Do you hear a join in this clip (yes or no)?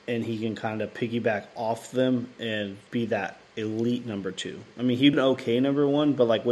yes